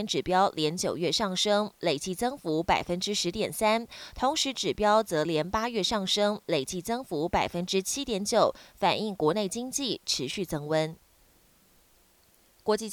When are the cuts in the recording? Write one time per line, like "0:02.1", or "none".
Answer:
none